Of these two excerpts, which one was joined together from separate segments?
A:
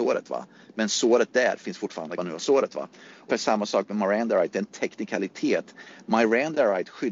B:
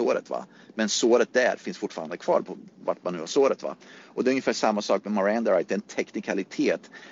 A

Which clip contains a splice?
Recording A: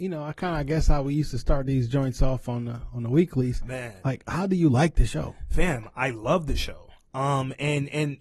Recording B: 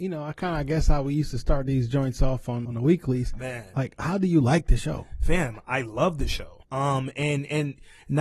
B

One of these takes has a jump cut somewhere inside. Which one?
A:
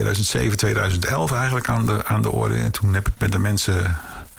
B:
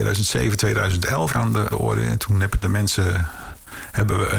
B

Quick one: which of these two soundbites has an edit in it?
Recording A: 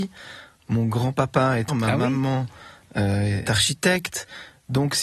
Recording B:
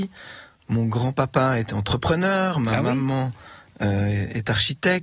A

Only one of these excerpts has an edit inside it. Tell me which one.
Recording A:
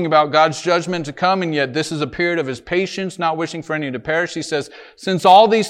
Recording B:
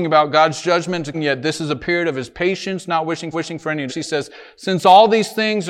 B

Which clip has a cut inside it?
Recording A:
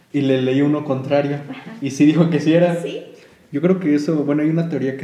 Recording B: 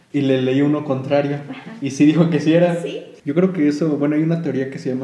B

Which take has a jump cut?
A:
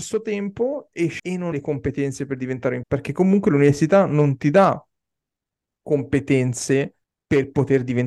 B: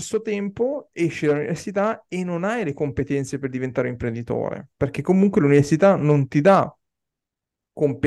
A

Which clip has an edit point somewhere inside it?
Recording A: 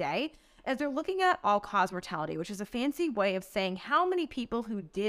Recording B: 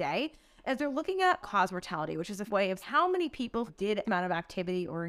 B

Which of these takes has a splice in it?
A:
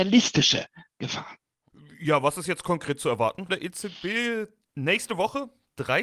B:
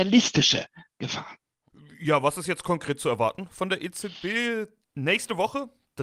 A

